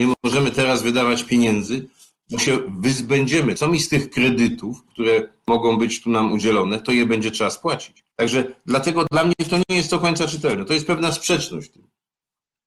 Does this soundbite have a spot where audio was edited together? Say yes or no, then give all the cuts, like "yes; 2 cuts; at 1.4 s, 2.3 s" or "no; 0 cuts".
yes; 1 cut; at 8.1 s